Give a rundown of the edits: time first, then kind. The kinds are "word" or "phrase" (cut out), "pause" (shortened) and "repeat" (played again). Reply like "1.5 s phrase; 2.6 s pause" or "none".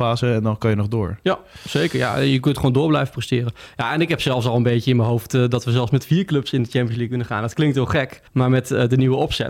8.3 s pause